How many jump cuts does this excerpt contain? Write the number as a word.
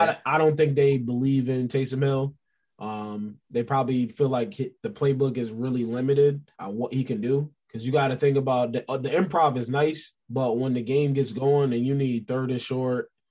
five